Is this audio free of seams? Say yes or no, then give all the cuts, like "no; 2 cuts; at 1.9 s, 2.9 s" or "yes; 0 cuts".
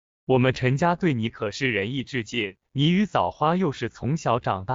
no; 1 cut; at 2.7 s